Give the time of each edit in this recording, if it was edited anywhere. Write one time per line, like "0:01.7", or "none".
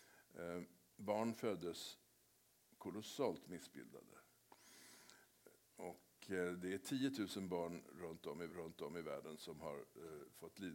0:08.5

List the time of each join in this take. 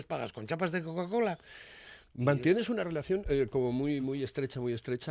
none

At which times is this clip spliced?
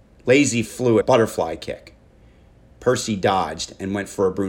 0:01.0

